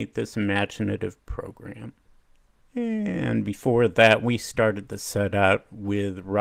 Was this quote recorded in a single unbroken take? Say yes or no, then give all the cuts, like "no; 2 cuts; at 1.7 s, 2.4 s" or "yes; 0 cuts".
yes; 0 cuts